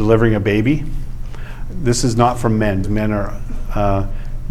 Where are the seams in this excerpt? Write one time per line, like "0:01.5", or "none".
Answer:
0:02.8